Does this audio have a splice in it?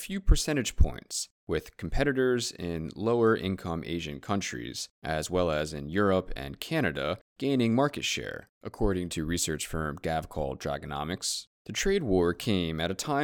yes; 1 cut; at 11.5 s

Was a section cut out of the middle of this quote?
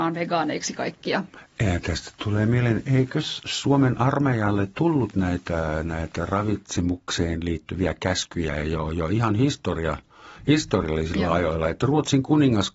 no; 0 cuts

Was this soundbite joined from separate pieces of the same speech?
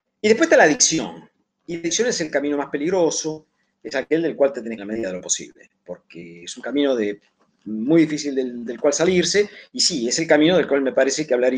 yes; 1 cut; at 4.8 s

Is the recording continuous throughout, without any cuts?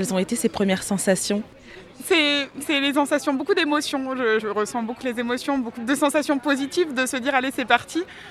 no; 3 cuts; at 4.4 s, 5.0 s, 5.8 s

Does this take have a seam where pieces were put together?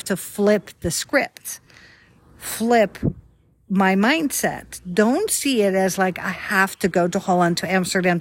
no; 0 cuts

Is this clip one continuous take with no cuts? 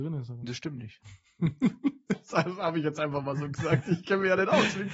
yes; 0 cuts

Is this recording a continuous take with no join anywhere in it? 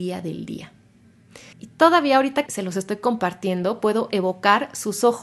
no; 2 cuts; at 1.5 s, 2.5 s

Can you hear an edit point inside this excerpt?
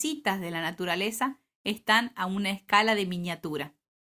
no; 0 cuts

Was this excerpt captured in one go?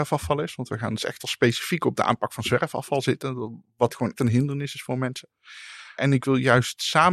no; 1 cut; at 4.2 s

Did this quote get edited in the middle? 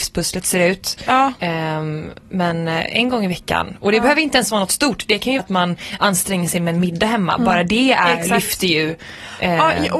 yes; 1 cut; at 5.4 s

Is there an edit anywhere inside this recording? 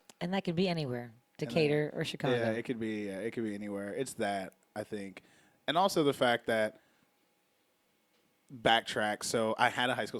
no; 0 cuts

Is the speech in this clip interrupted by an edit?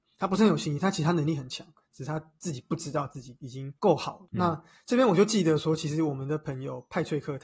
no; 0 cuts

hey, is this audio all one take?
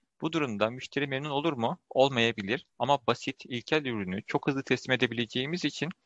no; 1 cut; at 2.7 s

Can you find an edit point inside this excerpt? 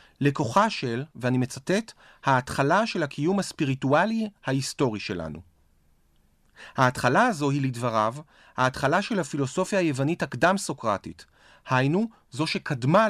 no; 0 cuts

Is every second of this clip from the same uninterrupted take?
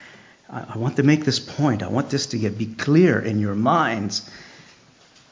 yes; 0 cuts

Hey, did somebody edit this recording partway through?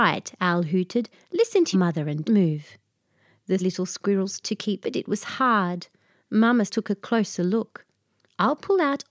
yes; 6 cuts; at 1.7 s, 2.2 s, 3.6 s, 4.4 s, 4.8 s, 6.7 s

